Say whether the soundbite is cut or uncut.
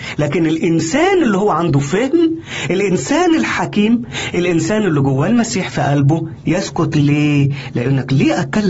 cut